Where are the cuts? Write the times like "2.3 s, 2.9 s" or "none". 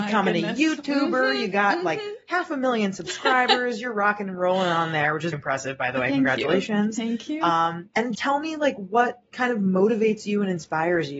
5.3 s, 8.1 s